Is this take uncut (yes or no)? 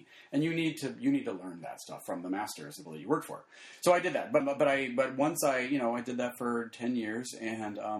no